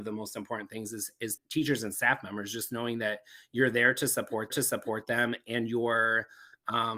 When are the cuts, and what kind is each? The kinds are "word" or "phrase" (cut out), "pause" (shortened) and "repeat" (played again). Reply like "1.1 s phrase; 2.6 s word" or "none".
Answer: 1.4 s word; 4.5 s repeat